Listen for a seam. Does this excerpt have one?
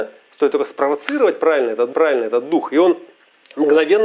yes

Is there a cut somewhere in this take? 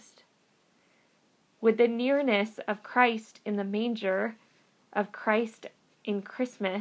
no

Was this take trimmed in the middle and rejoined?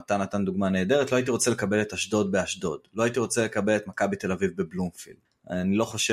no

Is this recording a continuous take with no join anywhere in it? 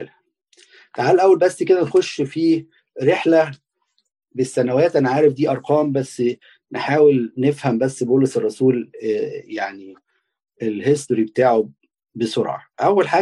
yes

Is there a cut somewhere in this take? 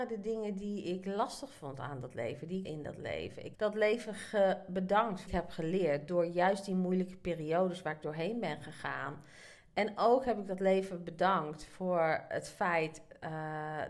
yes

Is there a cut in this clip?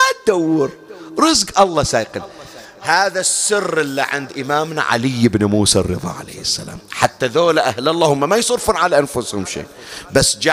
no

